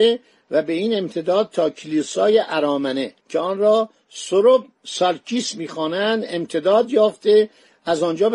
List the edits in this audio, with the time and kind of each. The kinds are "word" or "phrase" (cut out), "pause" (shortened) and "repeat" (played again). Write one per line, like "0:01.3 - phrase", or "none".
0:03.2 - pause